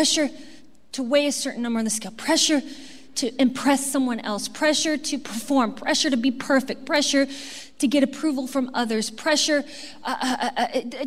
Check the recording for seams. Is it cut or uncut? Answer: uncut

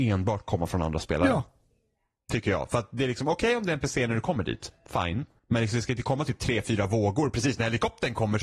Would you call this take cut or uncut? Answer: cut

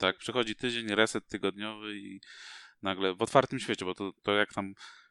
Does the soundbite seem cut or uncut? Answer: uncut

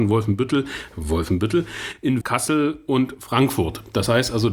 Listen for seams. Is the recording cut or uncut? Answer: cut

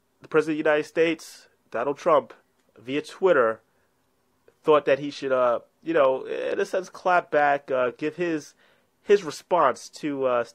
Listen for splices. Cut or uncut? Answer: uncut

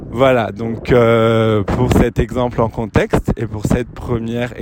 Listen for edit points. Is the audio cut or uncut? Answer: uncut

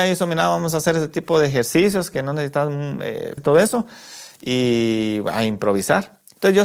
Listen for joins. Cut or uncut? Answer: cut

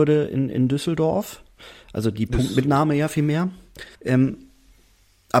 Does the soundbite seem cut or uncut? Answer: cut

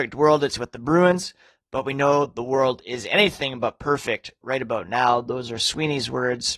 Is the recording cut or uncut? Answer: uncut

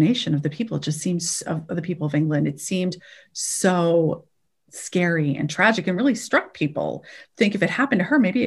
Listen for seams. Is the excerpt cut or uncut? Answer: uncut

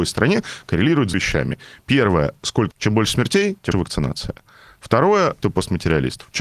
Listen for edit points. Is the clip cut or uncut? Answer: cut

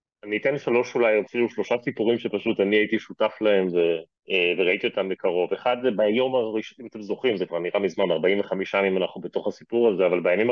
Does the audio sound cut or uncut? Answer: cut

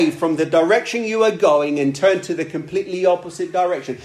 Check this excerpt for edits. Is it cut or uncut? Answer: uncut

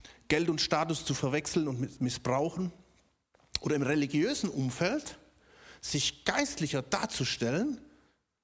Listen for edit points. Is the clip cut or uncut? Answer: uncut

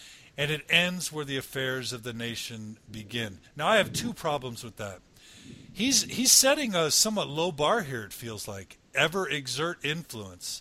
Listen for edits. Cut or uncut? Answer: cut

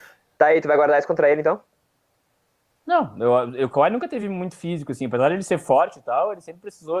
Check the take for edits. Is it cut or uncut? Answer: uncut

